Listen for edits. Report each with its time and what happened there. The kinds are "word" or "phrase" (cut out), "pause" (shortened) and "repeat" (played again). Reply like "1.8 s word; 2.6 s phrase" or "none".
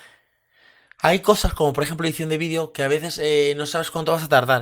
none